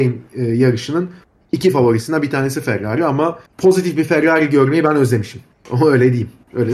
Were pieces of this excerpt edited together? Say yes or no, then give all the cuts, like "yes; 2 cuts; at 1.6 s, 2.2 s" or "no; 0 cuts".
yes; 1 cut; at 3.5 s